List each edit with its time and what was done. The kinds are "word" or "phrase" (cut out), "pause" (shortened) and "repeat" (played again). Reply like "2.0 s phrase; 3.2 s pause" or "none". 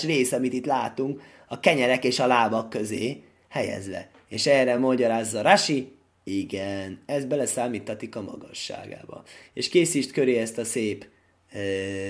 none

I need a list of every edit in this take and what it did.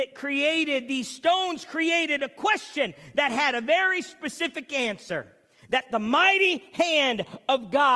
none

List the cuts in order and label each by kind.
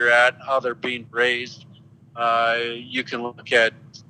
1.0 s word

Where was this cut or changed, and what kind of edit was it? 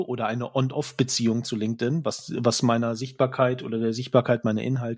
none

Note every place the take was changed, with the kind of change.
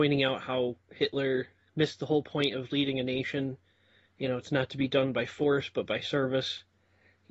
none

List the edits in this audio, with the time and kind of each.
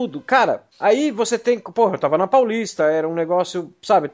none

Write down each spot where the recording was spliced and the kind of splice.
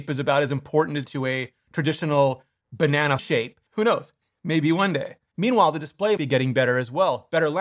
1.1 s phrase; 3.2 s word; 3.7 s word; 6.2 s word

